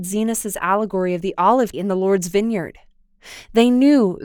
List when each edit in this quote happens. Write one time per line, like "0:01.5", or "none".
0:01.7